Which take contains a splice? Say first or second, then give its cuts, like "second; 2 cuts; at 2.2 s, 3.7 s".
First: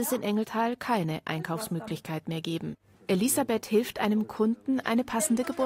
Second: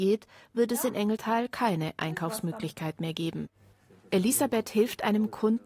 first; 1 cut; at 2.9 s